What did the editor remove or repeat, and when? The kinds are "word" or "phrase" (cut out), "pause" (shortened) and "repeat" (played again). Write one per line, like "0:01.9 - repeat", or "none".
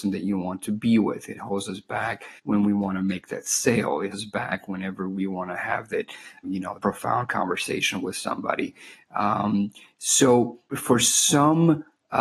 0:02.4 - pause
0:04.1 - word
0:06.4 - word
0:06.8 - word
0:10.7 - word

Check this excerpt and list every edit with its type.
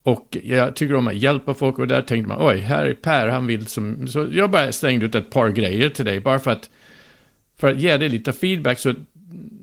none

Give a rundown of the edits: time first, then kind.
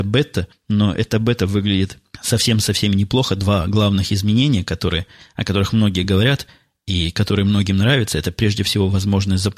none

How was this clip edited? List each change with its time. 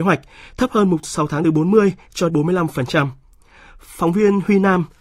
0:01.0 - phrase
0:01.4 - phrase
0:02.3 - word

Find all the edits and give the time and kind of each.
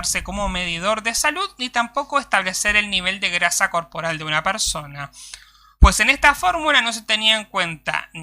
none

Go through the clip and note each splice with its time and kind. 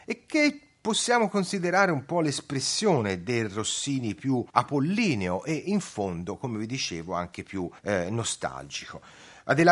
0:04.5 - pause
0:07.8 - pause

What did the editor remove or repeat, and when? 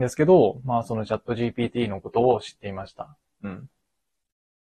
none

